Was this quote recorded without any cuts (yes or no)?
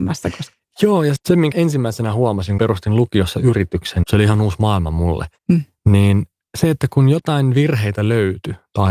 no